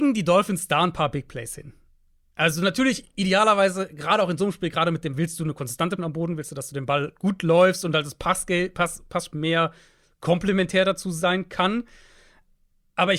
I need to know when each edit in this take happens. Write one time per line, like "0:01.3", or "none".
0:05.1
0:06.0
0:09.3